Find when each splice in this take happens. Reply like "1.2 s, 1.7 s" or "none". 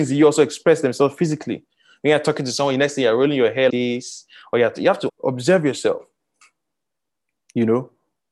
3.7 s, 5.1 s